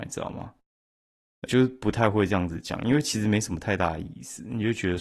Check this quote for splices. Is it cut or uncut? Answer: cut